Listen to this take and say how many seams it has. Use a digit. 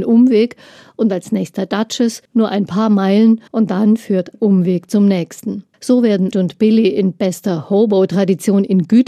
5